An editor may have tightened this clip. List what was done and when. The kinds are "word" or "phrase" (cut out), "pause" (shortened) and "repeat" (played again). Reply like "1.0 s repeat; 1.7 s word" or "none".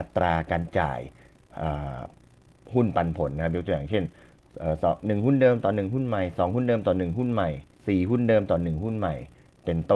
7.7 s pause